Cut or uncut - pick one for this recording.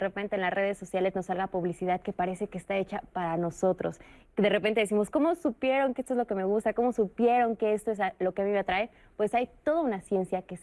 uncut